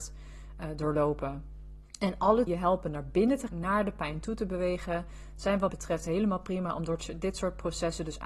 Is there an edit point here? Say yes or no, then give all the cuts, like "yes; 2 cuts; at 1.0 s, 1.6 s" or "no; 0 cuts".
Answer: yes; 4 cuts; at 1.9 s, 2.5 s, 3.5 s, 5.7 s